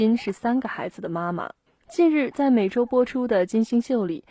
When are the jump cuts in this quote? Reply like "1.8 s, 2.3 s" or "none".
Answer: 1.7 s